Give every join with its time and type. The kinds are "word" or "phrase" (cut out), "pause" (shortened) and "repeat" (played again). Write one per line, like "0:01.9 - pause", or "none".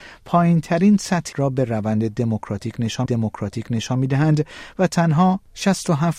0:01.3 - word
0:03.1 - repeat